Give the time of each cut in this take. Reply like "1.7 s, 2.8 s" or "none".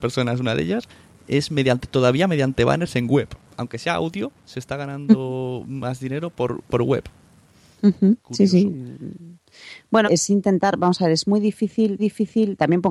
6.7 s, 8.2 s, 10.0 s, 12.0 s